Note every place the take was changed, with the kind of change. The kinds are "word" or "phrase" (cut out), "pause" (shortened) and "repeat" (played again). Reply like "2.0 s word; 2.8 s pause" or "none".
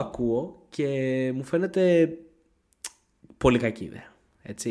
none